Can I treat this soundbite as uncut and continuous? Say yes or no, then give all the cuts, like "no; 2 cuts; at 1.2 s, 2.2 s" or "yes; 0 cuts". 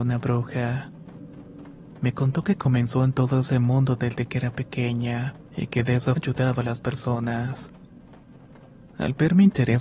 no; 2 cuts; at 5.5 s, 6.2 s